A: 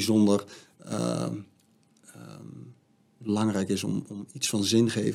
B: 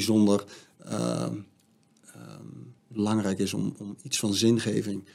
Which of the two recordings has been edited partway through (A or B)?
B